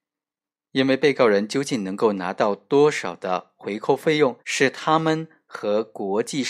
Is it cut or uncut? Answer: cut